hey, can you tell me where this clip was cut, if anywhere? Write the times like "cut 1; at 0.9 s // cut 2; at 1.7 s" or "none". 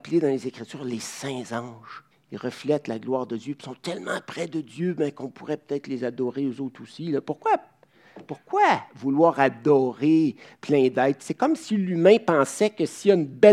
cut 1; at 2.1 s